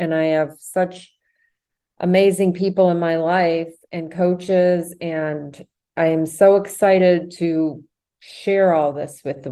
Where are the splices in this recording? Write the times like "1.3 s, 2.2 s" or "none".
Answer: none